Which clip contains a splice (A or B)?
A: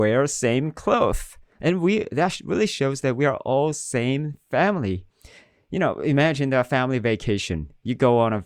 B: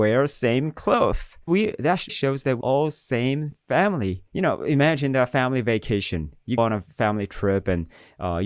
B